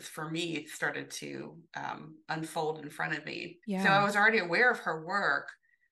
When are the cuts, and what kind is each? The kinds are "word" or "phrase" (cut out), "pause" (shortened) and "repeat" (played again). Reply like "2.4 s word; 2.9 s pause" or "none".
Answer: 3.6 s pause